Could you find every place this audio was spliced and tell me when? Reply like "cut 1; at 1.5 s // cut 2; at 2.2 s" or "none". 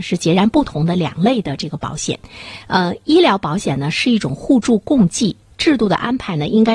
none